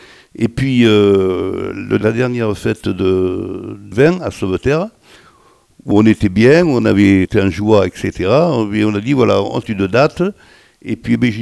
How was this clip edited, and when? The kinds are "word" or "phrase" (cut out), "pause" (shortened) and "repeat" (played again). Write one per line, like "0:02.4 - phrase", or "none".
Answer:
0:02.0 - word
0:03.9 - word
0:05.9 - word
0:07.2 - word
0:09.6 - word